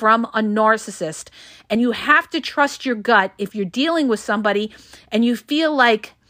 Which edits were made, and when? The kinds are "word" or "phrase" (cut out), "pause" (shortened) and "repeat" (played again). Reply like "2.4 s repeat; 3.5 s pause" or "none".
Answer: none